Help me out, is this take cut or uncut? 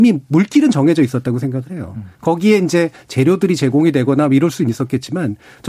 cut